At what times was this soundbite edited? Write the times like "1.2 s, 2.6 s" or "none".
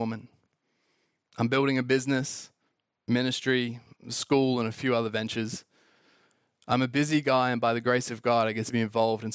none